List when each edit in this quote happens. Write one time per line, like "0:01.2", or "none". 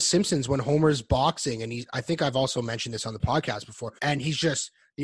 0:04.0